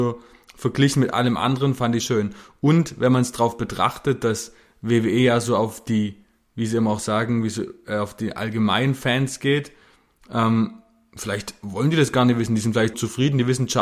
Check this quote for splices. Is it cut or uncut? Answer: cut